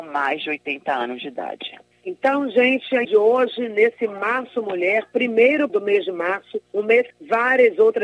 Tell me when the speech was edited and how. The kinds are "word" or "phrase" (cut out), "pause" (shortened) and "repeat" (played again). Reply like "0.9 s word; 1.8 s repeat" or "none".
1.9 s pause; 3.0 s word; 5.7 s word; 6.7 s pause; 7.1 s phrase